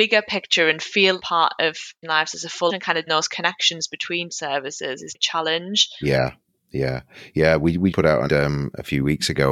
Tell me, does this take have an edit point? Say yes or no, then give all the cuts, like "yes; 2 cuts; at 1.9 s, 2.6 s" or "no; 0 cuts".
yes; 8 cuts; at 1.2 s, 2.0 s, 2.7 s, 3.1 s, 4.3 s, 5.1 s, 7.9 s, 8.3 s